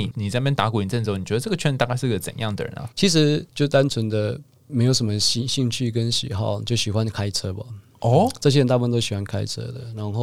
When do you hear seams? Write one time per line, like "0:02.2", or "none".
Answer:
0:02.9
0:03.5